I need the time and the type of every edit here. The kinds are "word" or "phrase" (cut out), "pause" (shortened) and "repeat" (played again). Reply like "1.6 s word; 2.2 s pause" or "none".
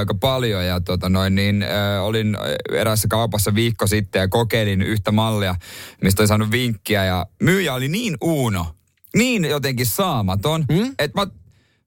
none